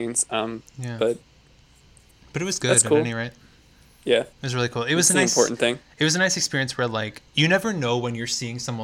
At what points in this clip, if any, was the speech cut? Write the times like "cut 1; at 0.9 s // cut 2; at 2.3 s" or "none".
cut 1; at 7.3 s